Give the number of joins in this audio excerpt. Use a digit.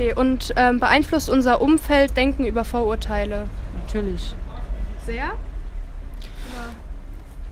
1